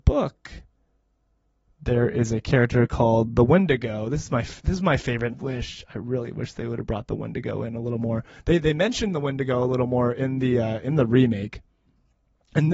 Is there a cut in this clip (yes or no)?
yes